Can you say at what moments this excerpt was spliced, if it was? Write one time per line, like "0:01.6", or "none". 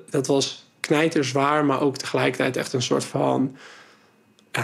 none